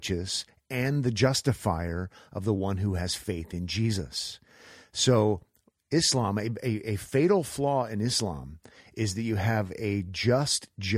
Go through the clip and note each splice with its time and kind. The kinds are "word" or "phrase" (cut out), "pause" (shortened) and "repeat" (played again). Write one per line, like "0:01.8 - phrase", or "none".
none